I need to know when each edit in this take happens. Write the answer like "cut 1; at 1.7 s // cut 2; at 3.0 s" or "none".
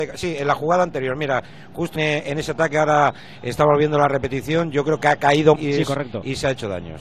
cut 1; at 2.0 s // cut 2; at 5.6 s